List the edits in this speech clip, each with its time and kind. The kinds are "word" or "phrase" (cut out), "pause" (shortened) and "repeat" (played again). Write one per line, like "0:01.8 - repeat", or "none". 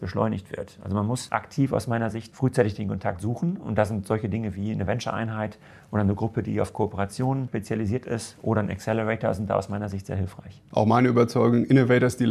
none